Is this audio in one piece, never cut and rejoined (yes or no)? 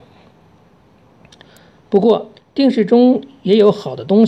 no